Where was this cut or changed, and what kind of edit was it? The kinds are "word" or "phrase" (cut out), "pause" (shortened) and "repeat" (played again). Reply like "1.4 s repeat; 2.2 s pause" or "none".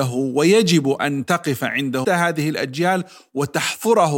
2.0 s phrase